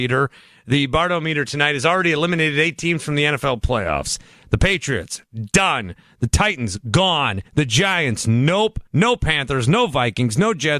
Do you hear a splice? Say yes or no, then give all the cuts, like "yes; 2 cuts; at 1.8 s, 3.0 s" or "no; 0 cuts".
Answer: yes; 2 cuts; at 7.5 s, 8.9 s